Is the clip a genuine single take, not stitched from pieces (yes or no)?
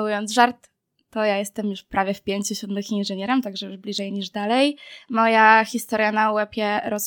yes